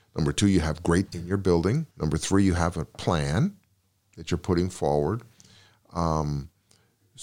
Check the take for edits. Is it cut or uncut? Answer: cut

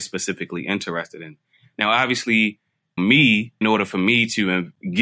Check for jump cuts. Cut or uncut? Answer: cut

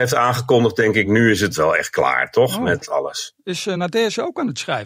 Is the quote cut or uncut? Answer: uncut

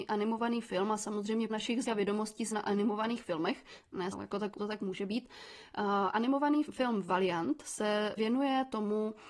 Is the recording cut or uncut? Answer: cut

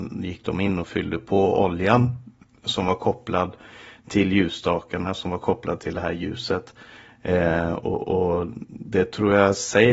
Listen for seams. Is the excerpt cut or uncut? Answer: uncut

